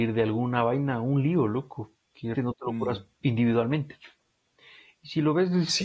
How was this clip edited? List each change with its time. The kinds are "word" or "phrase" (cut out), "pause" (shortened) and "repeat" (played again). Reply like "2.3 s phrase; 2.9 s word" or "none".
2.3 s word; 3.1 s pause